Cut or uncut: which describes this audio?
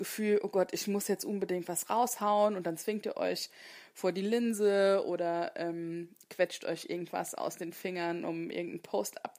uncut